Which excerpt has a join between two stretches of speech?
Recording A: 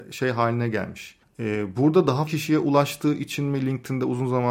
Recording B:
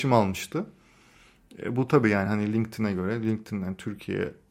A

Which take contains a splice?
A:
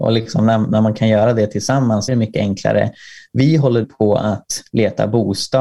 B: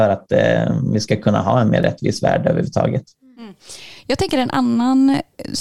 A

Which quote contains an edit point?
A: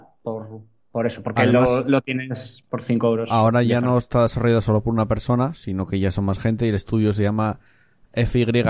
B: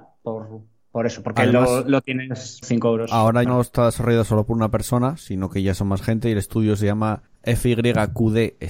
B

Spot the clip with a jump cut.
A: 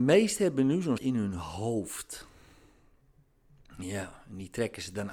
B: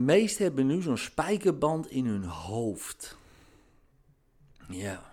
A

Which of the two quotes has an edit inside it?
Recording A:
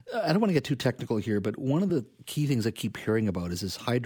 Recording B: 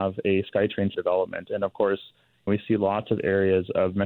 B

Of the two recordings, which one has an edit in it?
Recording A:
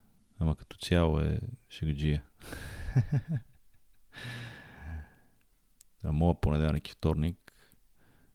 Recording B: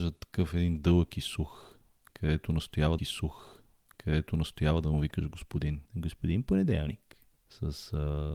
B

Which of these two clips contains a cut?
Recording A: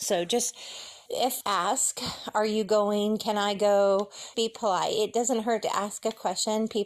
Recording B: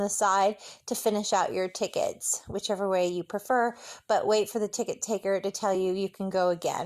A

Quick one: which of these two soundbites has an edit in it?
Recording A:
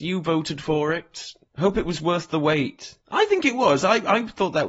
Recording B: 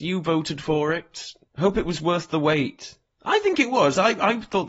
A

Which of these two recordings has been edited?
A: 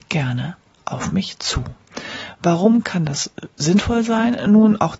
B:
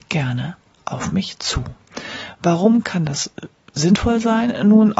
A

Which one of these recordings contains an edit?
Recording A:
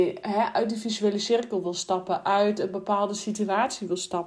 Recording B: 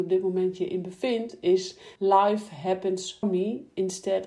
B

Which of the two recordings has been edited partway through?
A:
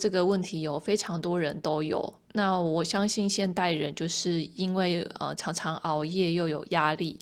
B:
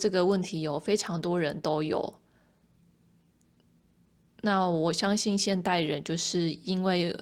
A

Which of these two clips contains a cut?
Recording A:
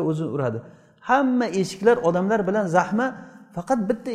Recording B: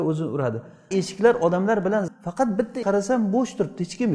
B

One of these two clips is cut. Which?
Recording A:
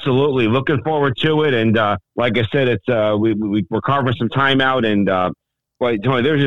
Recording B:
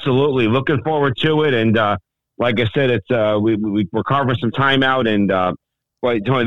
A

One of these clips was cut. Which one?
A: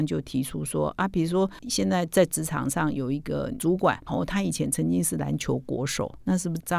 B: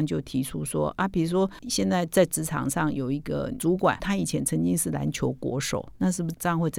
B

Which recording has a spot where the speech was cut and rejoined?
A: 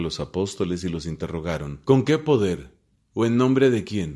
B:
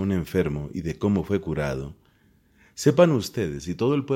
A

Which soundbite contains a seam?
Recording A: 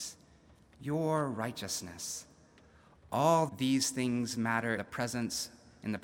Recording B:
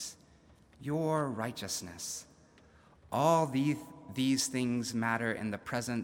A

